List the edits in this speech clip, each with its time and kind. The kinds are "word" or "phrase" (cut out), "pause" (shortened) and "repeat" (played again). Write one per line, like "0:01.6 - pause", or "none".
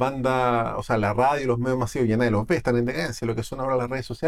none